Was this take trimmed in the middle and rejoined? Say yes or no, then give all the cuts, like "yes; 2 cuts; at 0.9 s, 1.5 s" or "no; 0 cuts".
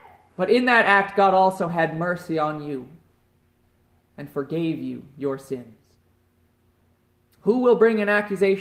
no; 0 cuts